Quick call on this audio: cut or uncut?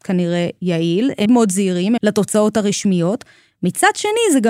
cut